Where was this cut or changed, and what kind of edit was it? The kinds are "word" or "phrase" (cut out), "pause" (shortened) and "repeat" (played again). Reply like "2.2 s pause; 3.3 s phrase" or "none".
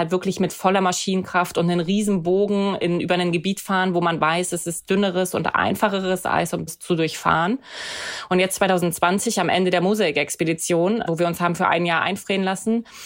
6.7 s word; 11.1 s word